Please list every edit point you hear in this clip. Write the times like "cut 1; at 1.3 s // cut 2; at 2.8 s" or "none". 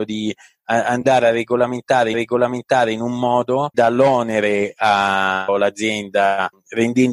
cut 1; at 2.1 s // cut 2; at 3.7 s // cut 3; at 5.5 s